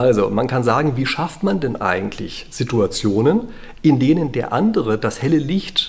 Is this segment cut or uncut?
uncut